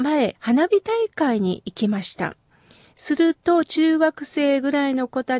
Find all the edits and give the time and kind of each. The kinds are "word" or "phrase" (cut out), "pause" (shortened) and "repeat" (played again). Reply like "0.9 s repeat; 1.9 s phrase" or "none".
none